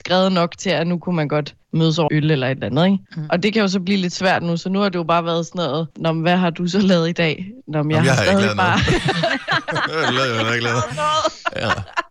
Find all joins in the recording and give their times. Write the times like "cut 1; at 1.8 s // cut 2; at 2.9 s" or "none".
cut 1; at 1.6 s // cut 2; at 2.1 s // cut 3; at 3.1 s // cut 4; at 5.9 s